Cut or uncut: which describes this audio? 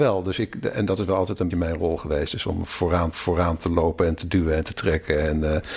cut